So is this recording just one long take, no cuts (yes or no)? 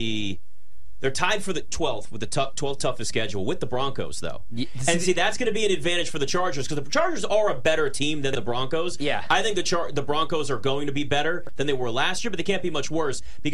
yes